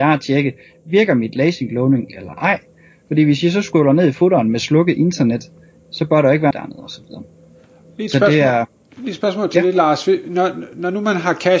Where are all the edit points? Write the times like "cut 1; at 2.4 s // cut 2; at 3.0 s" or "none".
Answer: cut 1; at 6.5 s